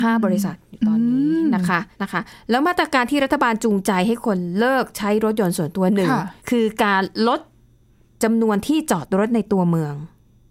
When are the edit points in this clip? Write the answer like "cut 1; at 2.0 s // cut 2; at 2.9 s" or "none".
cut 1; at 1.9 s // cut 2; at 6.4 s